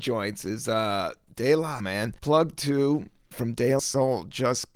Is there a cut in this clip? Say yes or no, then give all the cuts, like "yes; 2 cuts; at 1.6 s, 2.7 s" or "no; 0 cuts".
yes; 4 cuts; at 1.8 s, 2.2 s, 3.3 s, 3.8 s